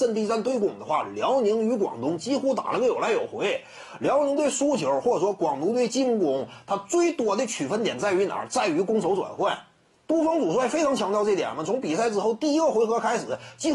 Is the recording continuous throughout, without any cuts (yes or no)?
yes